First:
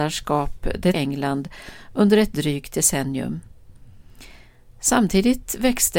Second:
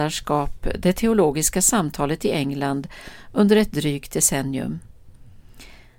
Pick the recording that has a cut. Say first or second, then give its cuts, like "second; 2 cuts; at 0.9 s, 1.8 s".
first; 1 cut; at 0.9 s